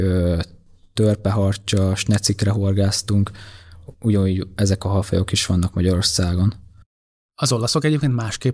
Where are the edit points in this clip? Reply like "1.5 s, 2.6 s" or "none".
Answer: none